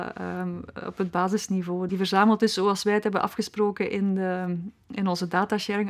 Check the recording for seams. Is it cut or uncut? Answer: cut